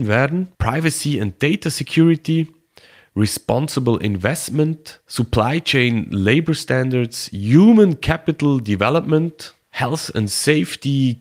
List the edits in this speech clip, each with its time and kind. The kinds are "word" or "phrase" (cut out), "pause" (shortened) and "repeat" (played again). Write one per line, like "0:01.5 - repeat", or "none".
none